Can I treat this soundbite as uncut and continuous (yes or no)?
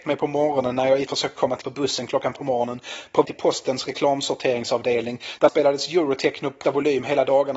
no